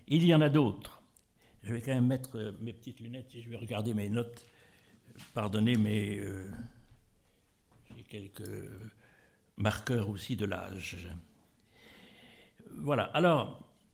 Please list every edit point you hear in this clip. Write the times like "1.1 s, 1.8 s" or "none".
none

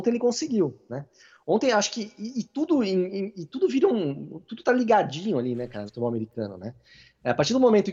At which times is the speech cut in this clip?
5.9 s

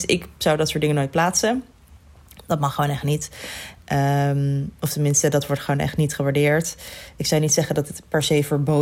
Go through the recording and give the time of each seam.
none

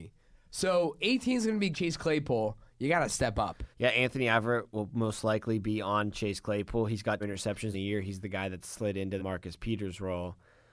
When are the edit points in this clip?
1.0 s, 1.7 s, 3.7 s, 7.2 s, 7.7 s, 9.2 s

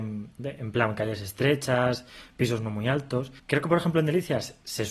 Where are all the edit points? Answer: 3.4 s

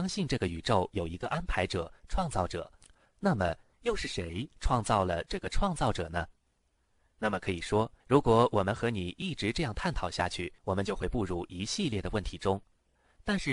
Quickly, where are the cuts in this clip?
8.0 s, 10.6 s

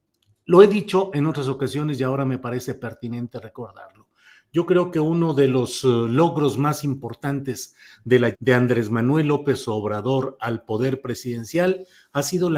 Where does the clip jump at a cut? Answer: 8.3 s

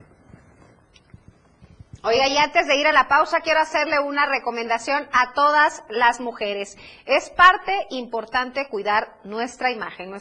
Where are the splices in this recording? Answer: none

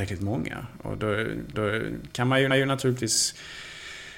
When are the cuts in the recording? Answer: 1.5 s, 2.5 s

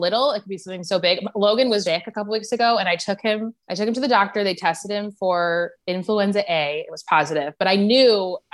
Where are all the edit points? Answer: 1.8 s, 3.6 s

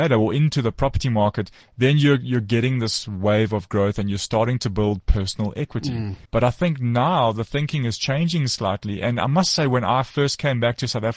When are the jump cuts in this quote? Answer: 6.3 s

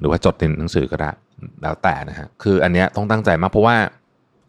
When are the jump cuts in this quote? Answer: 2.3 s

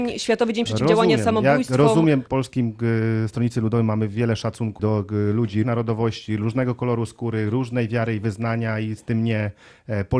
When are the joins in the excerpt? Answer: 2.3 s, 4.8 s, 5.6 s

